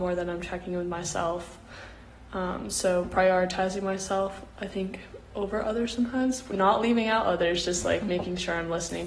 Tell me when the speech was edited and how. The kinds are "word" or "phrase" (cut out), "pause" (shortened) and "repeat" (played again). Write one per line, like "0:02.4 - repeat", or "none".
none